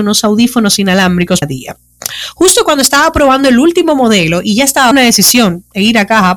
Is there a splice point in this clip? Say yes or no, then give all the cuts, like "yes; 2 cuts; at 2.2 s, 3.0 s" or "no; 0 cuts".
yes; 2 cuts; at 1.4 s, 4.9 s